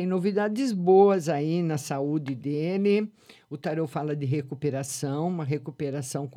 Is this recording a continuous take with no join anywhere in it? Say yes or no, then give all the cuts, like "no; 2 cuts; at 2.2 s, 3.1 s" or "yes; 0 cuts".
yes; 0 cuts